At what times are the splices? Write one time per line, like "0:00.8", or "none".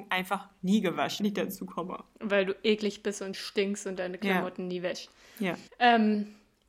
0:01.2
0:02.1
0:05.7